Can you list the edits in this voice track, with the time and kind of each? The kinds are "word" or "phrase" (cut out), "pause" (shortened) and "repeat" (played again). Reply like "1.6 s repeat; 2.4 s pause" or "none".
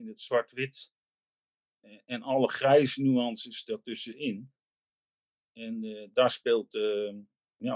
none